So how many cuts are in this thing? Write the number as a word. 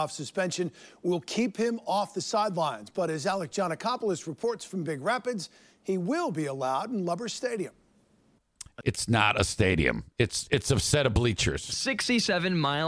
zero